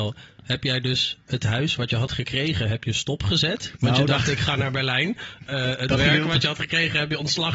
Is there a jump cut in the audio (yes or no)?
yes